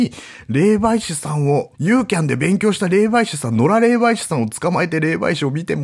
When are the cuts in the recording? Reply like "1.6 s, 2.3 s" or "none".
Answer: 1.7 s

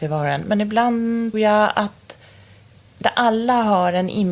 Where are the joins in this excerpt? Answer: 1.3 s, 3.0 s

